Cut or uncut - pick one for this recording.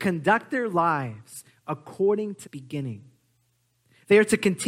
cut